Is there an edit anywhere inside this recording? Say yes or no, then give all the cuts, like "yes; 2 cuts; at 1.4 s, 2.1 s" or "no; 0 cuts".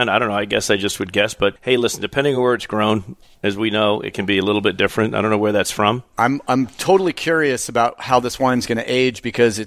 no; 0 cuts